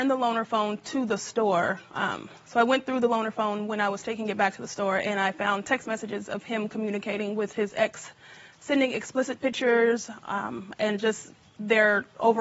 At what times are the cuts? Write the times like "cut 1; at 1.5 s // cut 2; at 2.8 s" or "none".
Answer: none